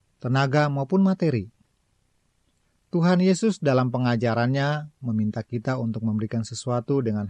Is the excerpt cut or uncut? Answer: uncut